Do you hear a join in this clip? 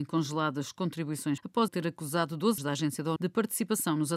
yes; 4 cuts; at 1.4 s, 1.7 s, 2.6 s, 3.2 s

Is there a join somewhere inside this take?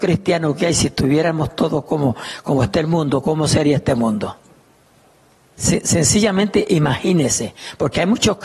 yes; 1 cut; at 5.0 s

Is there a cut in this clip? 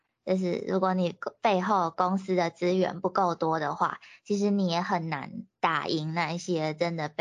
yes; 1 cut; at 5.5 s

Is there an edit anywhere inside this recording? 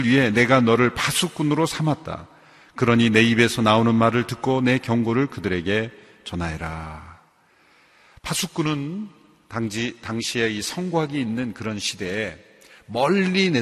no; 0 cuts

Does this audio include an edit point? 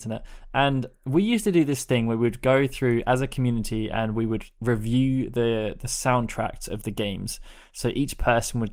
no; 0 cuts

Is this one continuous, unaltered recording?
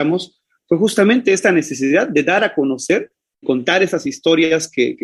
no; 1 cut; at 3.4 s

